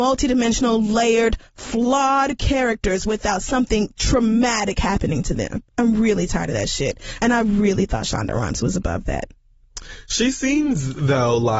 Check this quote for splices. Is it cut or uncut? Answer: cut